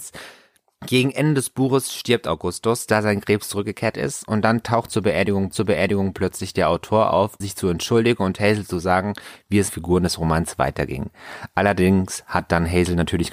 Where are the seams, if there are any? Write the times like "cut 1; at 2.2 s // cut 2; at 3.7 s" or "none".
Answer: cut 1; at 5.5 s // cut 2; at 7.4 s // cut 3; at 9.7 s